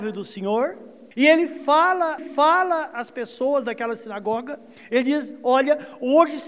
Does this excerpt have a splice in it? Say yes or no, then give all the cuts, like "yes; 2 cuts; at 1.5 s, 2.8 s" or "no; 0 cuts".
yes; 2 cuts; at 1.1 s, 2.2 s